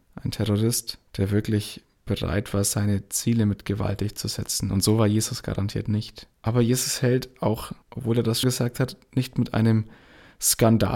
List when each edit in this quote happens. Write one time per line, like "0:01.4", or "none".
0:01.1
0:06.3
0:07.8
0:08.4